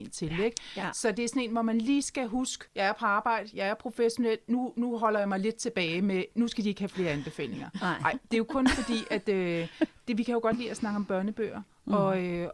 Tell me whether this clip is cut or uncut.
cut